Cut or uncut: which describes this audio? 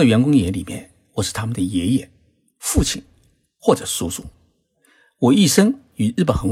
uncut